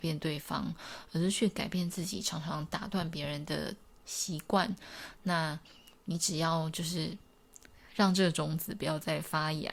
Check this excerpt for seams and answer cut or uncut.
uncut